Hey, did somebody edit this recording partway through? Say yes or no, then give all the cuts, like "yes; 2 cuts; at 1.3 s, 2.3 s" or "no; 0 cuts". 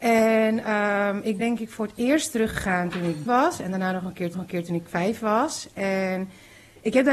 yes; 4 cuts; at 1.4 s, 3.3 s, 4.3 s, 4.9 s